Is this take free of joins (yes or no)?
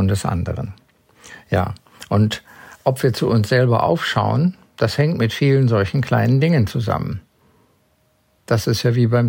yes